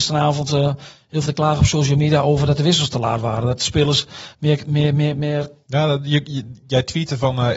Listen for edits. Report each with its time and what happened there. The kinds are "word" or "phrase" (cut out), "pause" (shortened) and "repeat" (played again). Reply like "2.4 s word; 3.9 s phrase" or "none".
1.3 s phrase